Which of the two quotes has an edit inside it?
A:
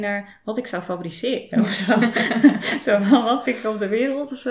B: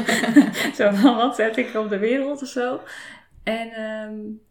A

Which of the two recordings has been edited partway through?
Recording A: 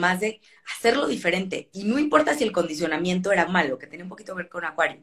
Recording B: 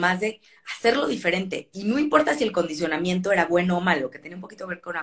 A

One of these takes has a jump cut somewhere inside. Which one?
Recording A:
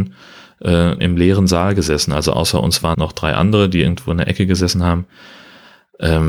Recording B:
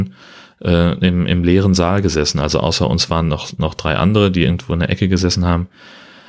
A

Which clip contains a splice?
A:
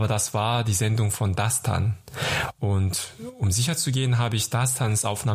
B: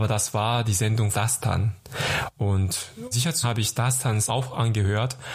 B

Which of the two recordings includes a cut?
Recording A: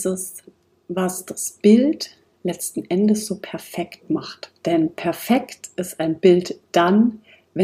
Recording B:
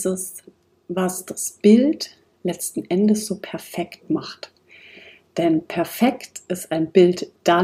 A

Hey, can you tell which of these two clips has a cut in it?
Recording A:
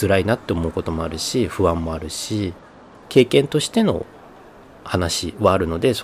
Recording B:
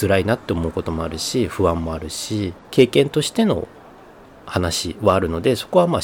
B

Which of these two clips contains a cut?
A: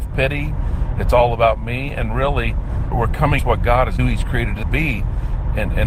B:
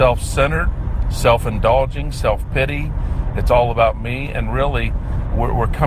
A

